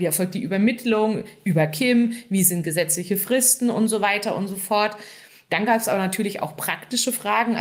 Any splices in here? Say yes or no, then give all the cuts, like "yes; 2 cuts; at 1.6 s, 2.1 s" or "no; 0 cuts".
no; 0 cuts